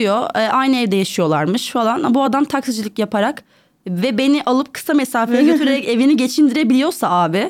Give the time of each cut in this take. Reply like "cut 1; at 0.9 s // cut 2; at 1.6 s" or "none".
none